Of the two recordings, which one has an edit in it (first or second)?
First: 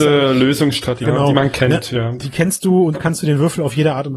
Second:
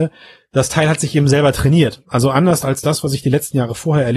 first